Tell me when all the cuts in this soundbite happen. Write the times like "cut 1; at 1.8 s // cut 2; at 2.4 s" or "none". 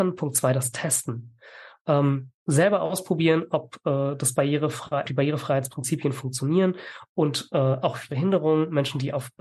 cut 1; at 2.4 s // cut 2; at 5.0 s // cut 3; at 8.1 s